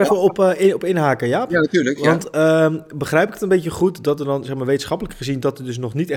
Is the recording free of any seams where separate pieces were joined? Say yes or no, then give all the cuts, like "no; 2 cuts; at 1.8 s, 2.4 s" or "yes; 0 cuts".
yes; 0 cuts